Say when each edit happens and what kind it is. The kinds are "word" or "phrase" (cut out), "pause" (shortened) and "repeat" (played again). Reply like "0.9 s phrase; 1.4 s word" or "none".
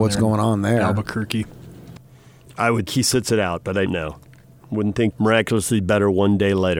2.9 s word; 3.9 s word; 5.1 s word